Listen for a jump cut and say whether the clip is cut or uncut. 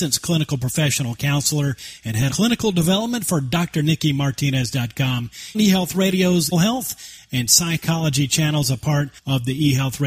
cut